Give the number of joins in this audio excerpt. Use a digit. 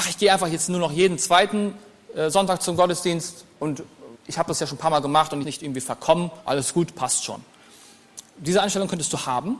3